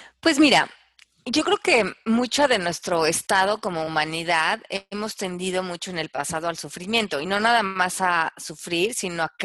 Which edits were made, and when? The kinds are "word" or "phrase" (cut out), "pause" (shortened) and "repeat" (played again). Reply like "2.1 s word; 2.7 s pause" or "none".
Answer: none